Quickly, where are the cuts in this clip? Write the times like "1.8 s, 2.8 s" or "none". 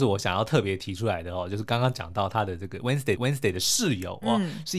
3.2 s